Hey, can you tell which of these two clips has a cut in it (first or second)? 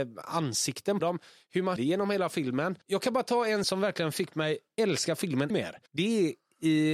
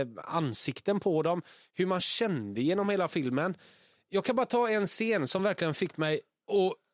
first